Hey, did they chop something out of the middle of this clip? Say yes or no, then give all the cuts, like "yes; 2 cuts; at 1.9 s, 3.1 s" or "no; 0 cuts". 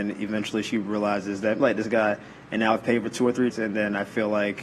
yes; 2 cuts; at 1.6 s, 3.5 s